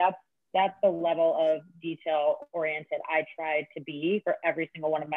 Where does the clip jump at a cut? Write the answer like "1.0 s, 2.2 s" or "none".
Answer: none